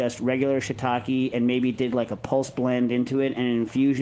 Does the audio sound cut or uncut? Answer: uncut